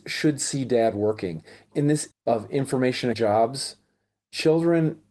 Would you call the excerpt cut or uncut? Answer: cut